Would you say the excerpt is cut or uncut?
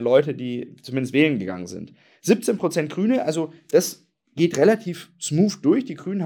uncut